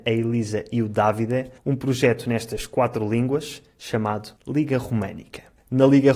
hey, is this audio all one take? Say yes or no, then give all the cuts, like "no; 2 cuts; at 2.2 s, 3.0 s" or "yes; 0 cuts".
no; 2 cuts; at 1.6 s, 4.4 s